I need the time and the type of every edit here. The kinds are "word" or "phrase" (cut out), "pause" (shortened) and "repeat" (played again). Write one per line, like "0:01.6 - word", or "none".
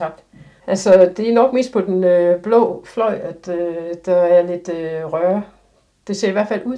none